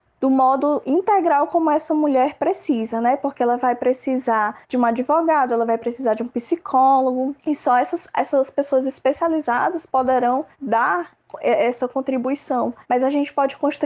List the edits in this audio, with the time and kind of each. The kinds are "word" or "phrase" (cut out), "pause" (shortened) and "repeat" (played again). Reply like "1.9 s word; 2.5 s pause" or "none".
4.6 s pause; 7.4 s pause; 10.5 s pause; 12.8 s pause